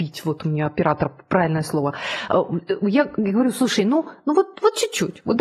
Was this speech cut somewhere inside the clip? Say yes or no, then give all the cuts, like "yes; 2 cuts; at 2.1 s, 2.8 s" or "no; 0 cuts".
no; 0 cuts